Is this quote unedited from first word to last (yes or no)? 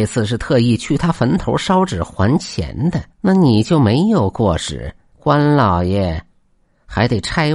no